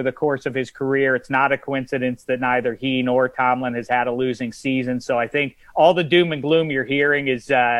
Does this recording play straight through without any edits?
no; 1 cut; at 5.6 s

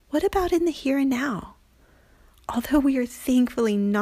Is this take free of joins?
yes; 0 cuts

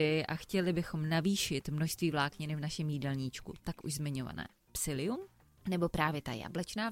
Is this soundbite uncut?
yes; 0 cuts

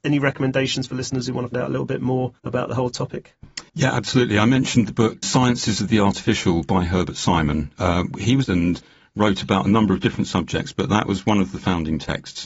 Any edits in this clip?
yes; 5 cuts; at 1.5 s, 2.4 s, 3.7 s, 5.2 s, 8.4 s

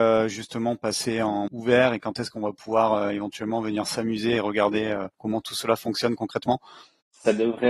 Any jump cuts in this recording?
yes; 2 cuts; at 1.5 s, 5.1 s

